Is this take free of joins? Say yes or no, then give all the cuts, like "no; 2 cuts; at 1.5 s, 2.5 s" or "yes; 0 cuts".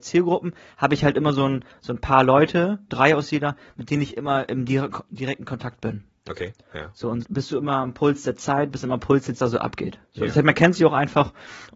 no; 3 cuts; at 2.9 s, 7.2 s, 9.4 s